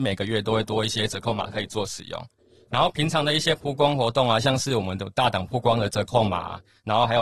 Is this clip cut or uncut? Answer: uncut